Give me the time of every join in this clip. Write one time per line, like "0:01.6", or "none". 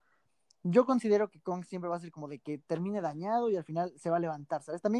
none